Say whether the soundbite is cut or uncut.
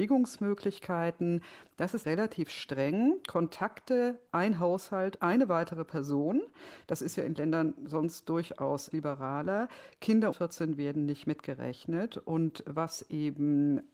cut